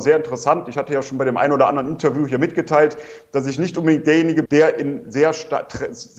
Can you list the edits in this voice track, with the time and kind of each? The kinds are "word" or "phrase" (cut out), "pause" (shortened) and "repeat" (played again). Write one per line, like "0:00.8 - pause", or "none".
0:04.5 - word